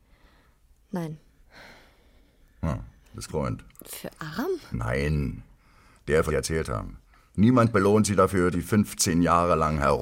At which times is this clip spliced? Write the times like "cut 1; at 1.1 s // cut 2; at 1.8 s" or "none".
cut 1; at 3.3 s // cut 2; at 3.7 s // cut 3; at 6.3 s // cut 4; at 7.1 s // cut 5; at 8.5 s